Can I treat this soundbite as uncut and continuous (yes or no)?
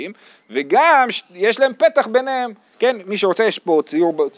yes